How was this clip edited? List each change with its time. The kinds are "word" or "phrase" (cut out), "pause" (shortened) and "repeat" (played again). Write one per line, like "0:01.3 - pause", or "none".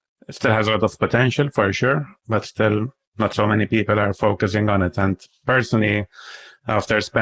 none